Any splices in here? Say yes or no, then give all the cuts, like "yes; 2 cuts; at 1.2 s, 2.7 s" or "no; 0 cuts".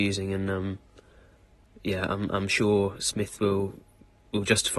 no; 0 cuts